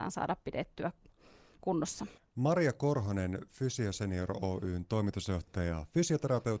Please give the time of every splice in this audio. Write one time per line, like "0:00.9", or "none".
0:02.2